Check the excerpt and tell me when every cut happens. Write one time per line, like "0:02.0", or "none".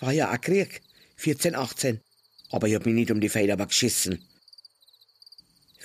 none